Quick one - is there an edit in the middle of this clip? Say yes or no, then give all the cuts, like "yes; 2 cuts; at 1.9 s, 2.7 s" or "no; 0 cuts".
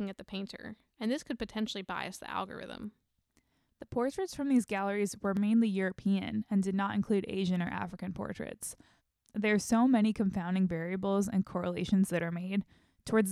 no; 0 cuts